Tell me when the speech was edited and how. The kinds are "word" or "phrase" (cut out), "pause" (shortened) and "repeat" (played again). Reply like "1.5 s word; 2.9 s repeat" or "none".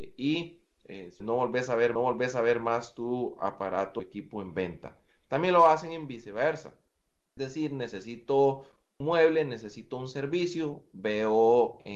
1.2 s word; 2.0 s repeat; 4.0 s phrase; 7.4 s word; 9.0 s word